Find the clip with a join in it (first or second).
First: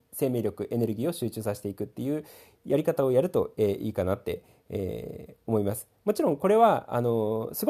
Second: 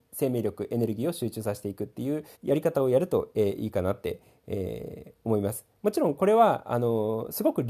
second